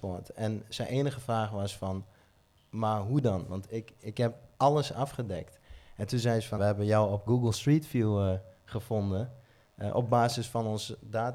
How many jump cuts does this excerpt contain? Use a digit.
2